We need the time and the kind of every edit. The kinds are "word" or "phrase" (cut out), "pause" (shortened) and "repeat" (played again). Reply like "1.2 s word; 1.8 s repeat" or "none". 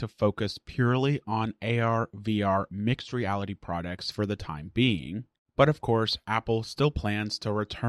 none